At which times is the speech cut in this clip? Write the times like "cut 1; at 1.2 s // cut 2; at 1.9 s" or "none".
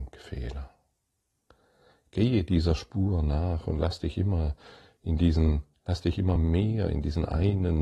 none